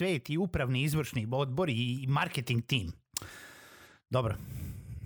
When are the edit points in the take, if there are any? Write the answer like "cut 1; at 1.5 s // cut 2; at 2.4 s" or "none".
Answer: none